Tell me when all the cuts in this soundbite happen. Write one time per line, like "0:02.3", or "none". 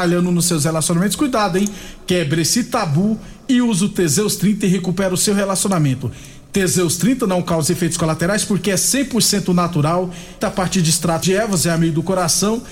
0:10.4
0:11.2